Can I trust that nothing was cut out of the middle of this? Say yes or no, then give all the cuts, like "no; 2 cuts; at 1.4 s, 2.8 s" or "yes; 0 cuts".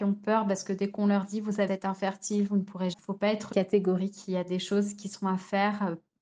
no; 3 cuts; at 1.7 s, 2.9 s, 3.5 s